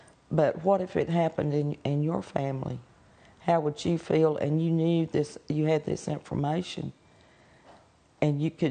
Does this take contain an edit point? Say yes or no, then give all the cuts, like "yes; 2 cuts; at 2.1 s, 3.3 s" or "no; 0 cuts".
no; 0 cuts